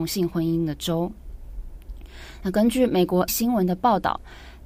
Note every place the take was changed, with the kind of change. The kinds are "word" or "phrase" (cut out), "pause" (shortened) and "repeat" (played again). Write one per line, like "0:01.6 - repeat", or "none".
0:03.3 - word